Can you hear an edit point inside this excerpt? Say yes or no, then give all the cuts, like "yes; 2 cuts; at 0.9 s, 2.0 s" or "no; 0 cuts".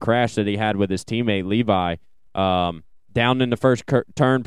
no; 0 cuts